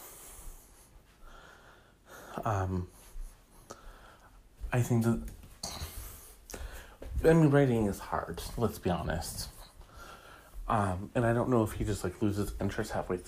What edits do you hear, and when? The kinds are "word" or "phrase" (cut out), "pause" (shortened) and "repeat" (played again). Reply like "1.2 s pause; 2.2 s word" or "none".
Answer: none